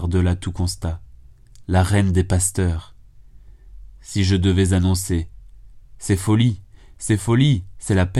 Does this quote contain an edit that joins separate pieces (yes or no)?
no